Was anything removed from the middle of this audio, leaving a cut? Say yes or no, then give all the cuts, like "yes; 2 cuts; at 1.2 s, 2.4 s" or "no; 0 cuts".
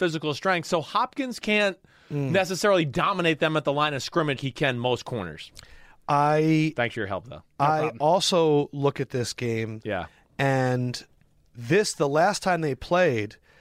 yes; 1 cut; at 4.4 s